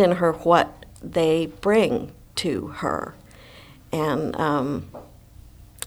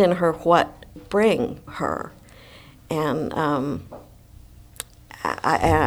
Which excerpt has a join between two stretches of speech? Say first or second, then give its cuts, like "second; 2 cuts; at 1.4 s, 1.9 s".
second; 2 cuts; at 1.0 s, 1.7 s